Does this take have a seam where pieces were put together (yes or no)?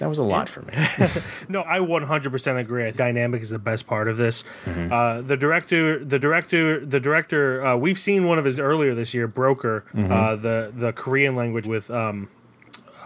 yes